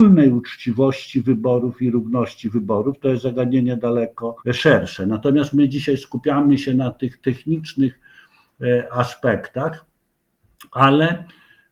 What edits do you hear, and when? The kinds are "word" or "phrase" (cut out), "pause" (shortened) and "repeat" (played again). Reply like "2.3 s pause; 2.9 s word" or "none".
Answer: 4.4 s pause